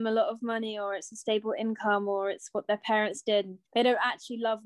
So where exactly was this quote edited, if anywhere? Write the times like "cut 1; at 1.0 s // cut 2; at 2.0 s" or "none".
cut 1; at 3.7 s

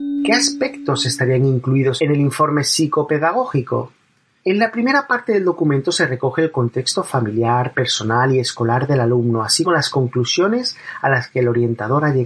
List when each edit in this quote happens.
cut 1; at 9.6 s

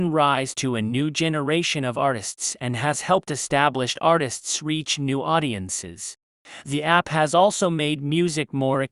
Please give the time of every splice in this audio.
none

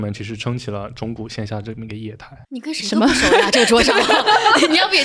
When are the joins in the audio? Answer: cut 1; at 2.4 s

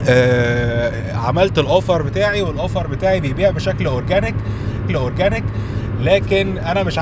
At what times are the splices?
cut 1; at 4.9 s

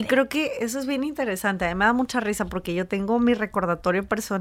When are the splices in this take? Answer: none

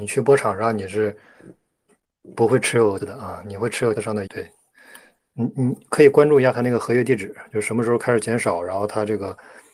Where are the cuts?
cut 1; at 3.0 s // cut 2; at 3.9 s // cut 3; at 4.3 s

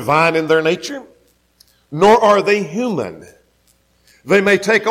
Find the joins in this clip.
none

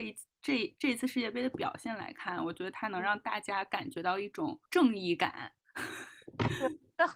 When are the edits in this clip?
cut 1; at 4.7 s

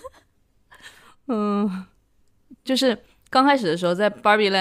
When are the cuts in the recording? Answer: none

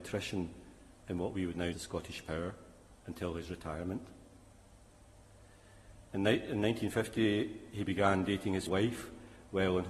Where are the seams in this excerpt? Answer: cut 1; at 1.7 s // cut 2; at 3.0 s // cut 3; at 6.1 s // cut 4; at 8.7 s

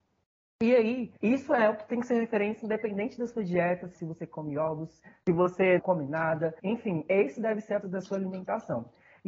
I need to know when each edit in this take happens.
cut 1; at 1.2 s // cut 2; at 3.9 s // cut 3; at 5.8 s // cut 4; at 6.6 s // cut 5; at 7.8 s

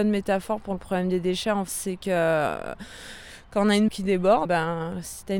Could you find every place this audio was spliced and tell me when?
cut 1; at 1.7 s // cut 2; at 3.9 s // cut 3; at 4.4 s

